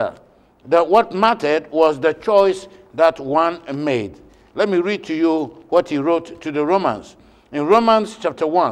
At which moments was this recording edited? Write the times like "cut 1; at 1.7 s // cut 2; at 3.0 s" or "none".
none